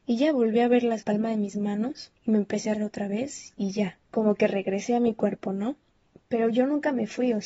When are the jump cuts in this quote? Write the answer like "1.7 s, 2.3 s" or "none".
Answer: 1.0 s, 2.2 s, 2.7 s, 4.1 s, 6.1 s